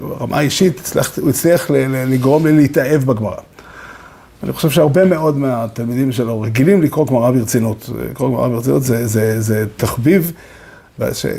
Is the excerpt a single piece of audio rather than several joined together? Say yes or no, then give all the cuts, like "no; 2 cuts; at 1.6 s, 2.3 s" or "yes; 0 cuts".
yes; 0 cuts